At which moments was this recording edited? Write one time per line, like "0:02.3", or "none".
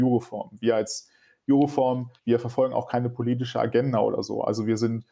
0:02.2